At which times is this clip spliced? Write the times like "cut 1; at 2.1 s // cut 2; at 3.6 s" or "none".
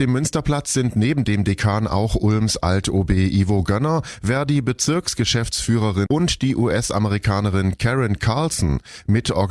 cut 1; at 6.1 s

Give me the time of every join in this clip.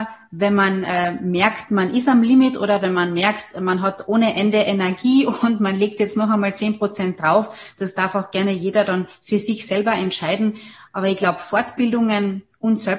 none

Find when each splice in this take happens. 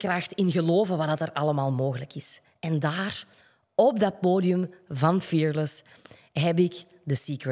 none

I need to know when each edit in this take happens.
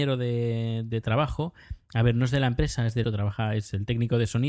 cut 1; at 3.0 s

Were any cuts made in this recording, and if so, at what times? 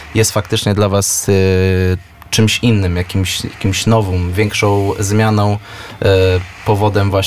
none

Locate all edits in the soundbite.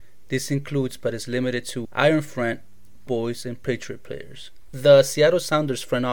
cut 1; at 1.8 s // cut 2; at 3.1 s

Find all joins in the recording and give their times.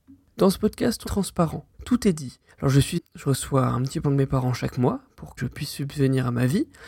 cut 1; at 1.1 s // cut 2; at 1.7 s // cut 3; at 2.5 s // cut 4; at 3.0 s // cut 5; at 4.0 s // cut 6; at 5.4 s

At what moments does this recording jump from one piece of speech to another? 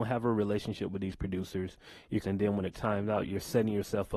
cut 1; at 2.2 s // cut 2; at 2.7 s // cut 3; at 3.2 s

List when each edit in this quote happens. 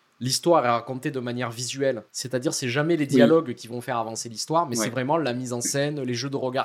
cut 1; at 2.1 s

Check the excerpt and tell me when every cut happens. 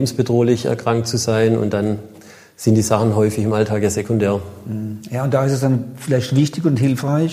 none

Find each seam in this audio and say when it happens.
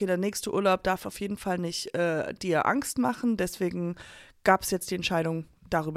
none

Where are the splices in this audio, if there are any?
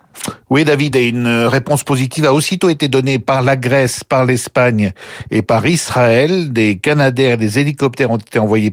none

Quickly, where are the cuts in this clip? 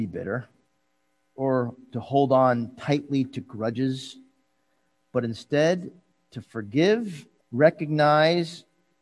cut 1; at 7.4 s

